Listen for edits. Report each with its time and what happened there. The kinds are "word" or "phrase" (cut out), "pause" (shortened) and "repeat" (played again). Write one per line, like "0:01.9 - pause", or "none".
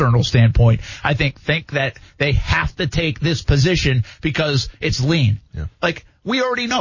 0:05.5 - pause